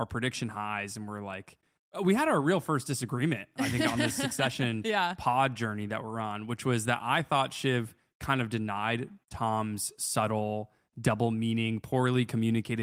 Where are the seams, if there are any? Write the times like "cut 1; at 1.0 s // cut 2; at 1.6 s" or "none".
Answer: none